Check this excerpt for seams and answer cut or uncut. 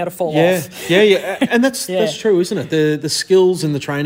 cut